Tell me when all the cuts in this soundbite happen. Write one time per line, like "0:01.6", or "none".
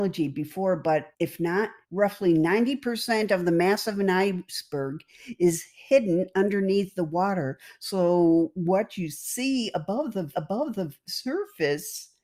0:01.1
0:01.8
0:10.3